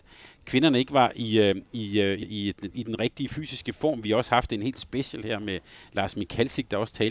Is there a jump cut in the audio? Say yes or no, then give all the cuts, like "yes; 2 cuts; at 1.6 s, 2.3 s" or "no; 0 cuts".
yes; 1 cut; at 2.2 s